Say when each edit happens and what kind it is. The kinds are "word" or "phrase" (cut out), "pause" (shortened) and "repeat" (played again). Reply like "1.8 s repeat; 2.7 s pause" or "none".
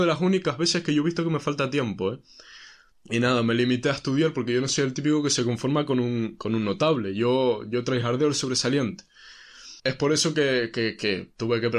2.9 s pause; 9.8 s pause